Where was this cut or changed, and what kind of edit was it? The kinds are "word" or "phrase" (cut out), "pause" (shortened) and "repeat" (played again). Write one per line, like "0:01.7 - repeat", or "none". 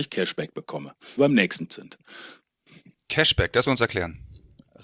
0:01.2 - phrase
0:01.7 - word
0:03.7 - word